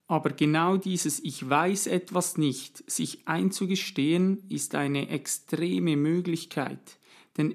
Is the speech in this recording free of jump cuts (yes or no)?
yes